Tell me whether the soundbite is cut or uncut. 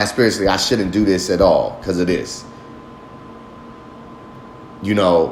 uncut